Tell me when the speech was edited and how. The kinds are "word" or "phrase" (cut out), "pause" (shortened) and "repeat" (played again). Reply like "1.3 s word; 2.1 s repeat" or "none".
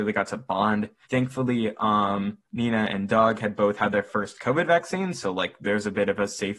1.0 s pause; 2.4 s pause